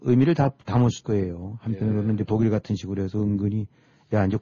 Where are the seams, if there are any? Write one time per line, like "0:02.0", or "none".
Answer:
0:01.0
0:02.3